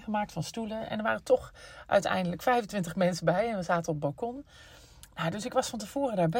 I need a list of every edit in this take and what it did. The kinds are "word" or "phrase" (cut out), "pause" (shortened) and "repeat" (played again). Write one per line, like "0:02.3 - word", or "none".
none